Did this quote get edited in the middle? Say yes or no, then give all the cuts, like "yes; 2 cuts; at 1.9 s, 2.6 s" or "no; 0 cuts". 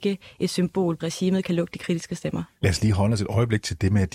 yes; 1 cut; at 1.0 s